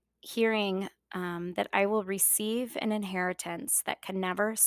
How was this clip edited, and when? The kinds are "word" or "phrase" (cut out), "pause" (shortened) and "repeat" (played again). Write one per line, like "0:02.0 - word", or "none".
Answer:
none